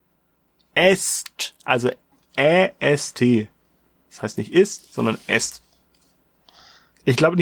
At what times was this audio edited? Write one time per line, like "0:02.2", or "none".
none